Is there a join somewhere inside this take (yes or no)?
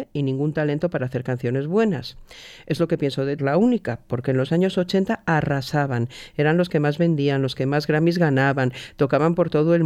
yes